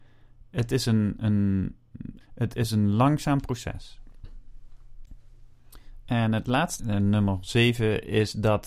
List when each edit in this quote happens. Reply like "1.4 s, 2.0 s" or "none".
2.2 s, 6.8 s